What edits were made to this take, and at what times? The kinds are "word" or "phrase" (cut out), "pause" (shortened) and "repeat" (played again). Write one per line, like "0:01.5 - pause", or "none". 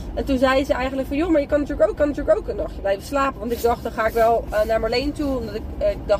0:02.0 - repeat